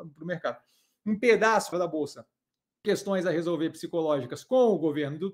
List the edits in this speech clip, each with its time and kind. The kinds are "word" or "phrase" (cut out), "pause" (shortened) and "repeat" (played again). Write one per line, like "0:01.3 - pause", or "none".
0:01.7 - word
0:02.8 - word